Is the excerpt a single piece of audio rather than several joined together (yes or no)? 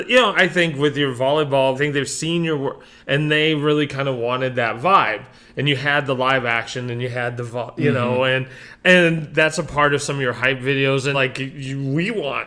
no